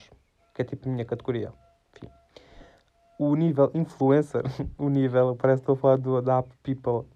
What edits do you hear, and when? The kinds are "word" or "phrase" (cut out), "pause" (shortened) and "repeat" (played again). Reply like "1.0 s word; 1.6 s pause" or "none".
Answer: none